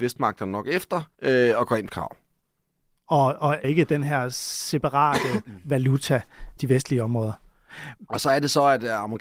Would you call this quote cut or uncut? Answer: cut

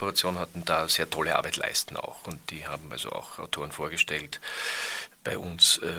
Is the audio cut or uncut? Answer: uncut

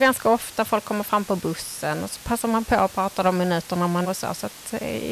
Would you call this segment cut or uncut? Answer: cut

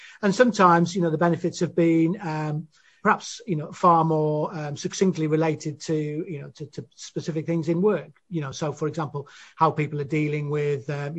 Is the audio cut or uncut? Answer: uncut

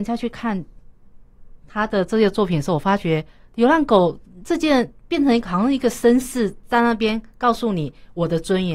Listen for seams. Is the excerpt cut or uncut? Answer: cut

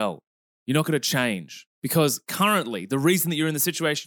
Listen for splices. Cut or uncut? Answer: cut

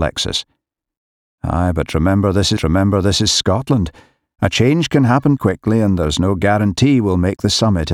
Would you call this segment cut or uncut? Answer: cut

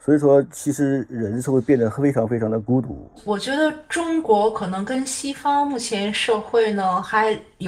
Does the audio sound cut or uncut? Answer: uncut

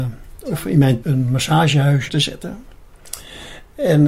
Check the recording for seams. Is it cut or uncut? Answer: cut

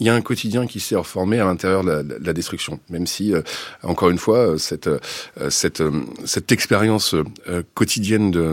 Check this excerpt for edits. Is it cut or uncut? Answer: uncut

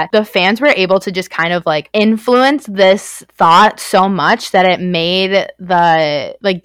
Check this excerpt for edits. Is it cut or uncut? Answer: uncut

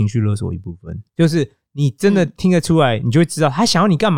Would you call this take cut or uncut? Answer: cut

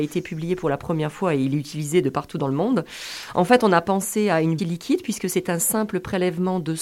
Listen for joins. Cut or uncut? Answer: cut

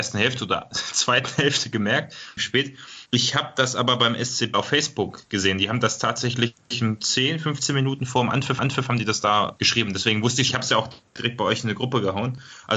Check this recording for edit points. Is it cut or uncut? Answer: cut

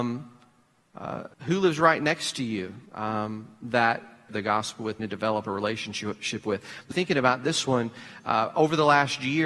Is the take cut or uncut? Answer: cut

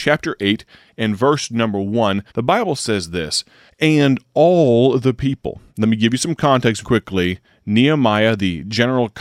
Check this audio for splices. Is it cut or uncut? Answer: cut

